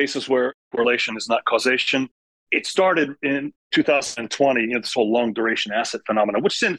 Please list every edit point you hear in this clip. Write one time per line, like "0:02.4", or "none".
none